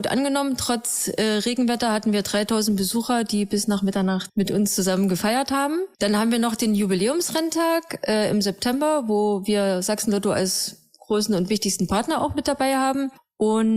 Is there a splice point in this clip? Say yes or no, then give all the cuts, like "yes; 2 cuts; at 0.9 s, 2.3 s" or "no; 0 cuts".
no; 0 cuts